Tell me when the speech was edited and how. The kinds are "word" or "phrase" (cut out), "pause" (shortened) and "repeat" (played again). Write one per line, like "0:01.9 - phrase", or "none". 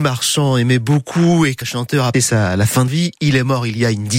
0:01.6 - word
0:02.1 - word
0:02.9 - word